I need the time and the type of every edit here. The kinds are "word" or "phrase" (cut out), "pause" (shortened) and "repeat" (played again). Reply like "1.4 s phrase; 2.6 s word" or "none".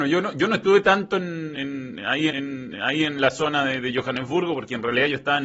2.3 s repeat